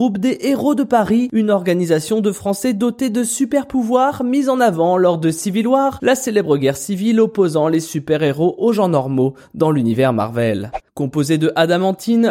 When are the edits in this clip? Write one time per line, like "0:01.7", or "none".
none